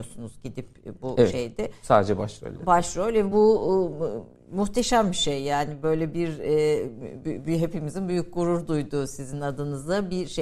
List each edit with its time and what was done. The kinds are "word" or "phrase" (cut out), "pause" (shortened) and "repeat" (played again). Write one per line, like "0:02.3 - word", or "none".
none